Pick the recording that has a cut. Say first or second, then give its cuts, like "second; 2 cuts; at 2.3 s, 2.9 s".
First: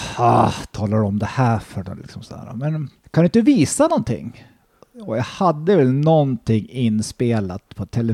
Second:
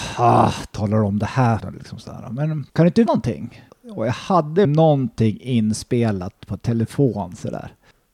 second; 5 cuts; at 1.6 s, 2.7 s, 3.1 s, 3.7 s, 4.6 s